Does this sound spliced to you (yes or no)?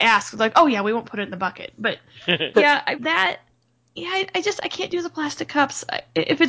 yes